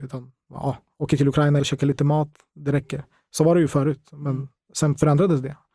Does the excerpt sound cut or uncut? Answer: cut